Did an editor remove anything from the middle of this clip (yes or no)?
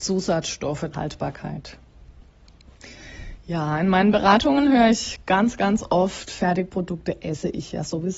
yes